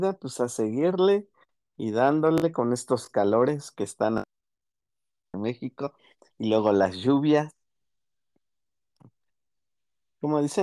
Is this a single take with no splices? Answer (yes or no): yes